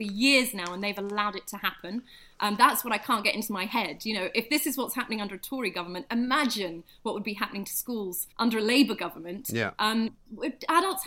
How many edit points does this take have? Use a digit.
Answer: 1